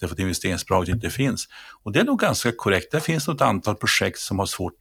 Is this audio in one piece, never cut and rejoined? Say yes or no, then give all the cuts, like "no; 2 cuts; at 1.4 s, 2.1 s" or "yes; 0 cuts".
yes; 0 cuts